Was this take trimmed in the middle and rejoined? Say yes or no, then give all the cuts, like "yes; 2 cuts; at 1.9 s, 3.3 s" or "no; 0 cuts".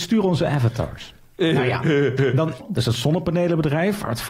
yes; 1 cut; at 2.6 s